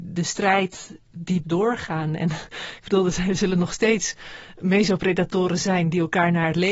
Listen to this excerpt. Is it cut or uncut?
cut